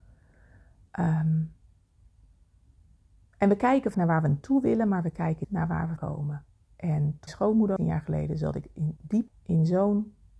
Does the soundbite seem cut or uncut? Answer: cut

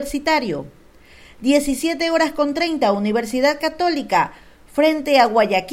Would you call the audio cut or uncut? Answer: uncut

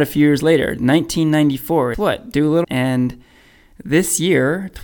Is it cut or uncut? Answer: cut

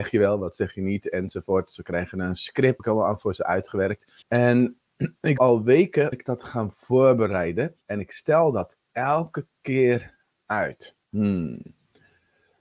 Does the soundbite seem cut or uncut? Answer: cut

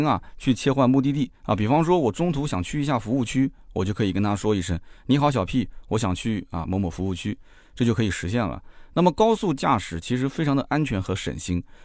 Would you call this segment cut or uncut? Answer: cut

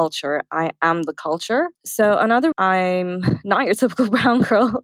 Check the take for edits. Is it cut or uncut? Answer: cut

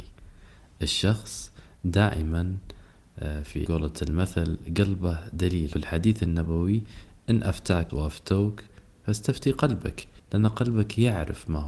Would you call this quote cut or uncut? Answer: cut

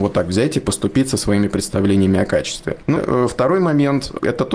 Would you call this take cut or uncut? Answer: cut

